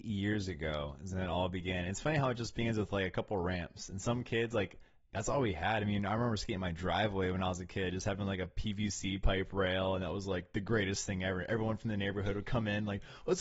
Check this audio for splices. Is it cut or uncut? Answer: uncut